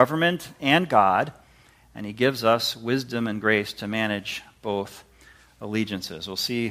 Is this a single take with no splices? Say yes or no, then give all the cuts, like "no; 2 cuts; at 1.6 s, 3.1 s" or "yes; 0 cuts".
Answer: yes; 0 cuts